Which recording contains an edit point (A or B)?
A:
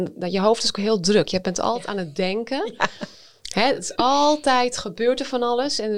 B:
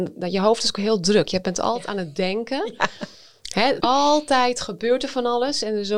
B